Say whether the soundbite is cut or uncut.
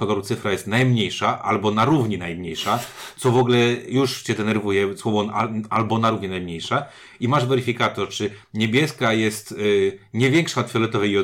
uncut